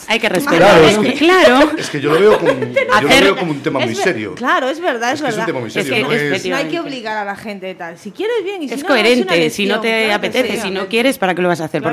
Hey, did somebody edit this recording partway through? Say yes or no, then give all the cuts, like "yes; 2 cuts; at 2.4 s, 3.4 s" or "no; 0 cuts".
no; 0 cuts